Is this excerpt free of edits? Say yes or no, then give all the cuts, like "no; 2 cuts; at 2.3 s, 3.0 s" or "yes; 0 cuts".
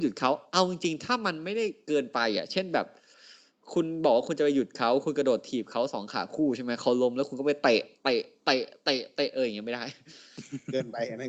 yes; 0 cuts